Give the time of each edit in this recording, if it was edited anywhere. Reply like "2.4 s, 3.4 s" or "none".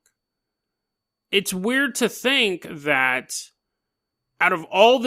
none

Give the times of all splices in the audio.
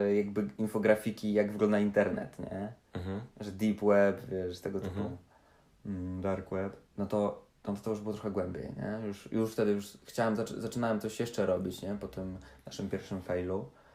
6.9 s

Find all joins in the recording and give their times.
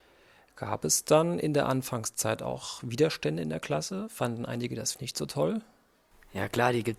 4.9 s

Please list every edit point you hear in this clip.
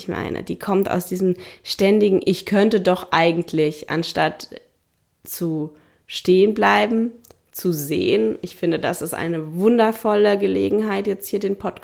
none

